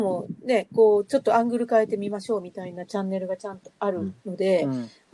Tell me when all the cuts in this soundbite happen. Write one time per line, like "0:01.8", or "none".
0:04.2